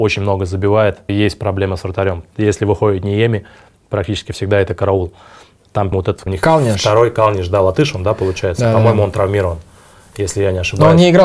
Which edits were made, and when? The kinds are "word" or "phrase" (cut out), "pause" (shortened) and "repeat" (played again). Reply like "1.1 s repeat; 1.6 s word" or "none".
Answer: 1.1 s word; 5.9 s word; 6.3 s word

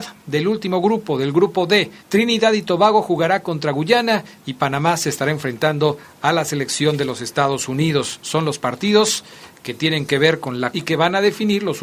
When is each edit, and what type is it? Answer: 2.0 s pause; 10.7 s phrase

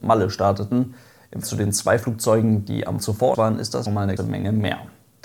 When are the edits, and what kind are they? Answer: 1.4 s word; 3.0 s word; 3.3 s word; 3.9 s phrase; 4.2 s word

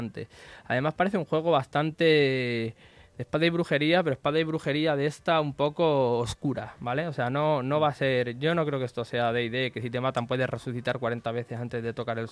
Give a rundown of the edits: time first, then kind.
none

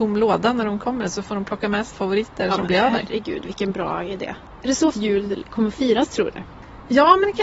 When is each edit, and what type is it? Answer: 1.9 s word; 4.9 s word

